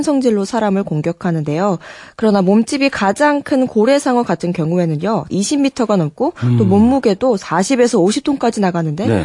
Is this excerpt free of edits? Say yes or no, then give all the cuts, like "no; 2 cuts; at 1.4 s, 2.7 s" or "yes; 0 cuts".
no; 1 cut; at 5.3 s